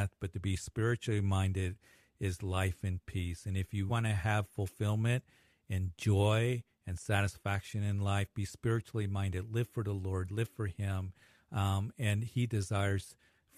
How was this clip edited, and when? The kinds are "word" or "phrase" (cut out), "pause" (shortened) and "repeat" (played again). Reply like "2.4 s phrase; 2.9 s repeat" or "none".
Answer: 3.9 s word

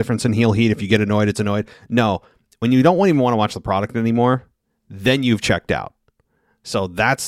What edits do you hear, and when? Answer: none

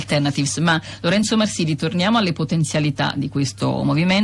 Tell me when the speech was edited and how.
none

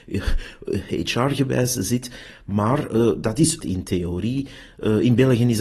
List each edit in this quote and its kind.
3.6 s phrase

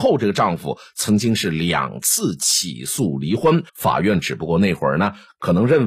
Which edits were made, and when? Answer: 3.7 s pause

